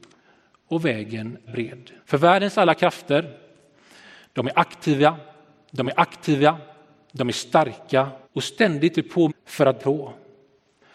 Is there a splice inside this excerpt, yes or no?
yes